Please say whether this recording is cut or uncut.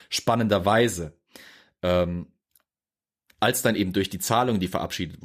uncut